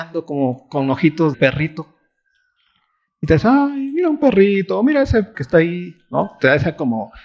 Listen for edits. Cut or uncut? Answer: cut